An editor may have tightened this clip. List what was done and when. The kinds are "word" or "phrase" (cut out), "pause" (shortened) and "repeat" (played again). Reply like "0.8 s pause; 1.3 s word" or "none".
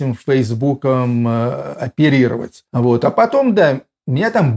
2.7 s pause